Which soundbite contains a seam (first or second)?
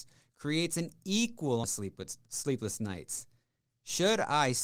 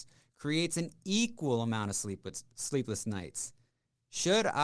first